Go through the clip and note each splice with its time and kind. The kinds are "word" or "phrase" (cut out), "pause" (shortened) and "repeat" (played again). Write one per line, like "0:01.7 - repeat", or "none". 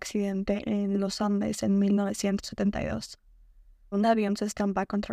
0:03.9 - word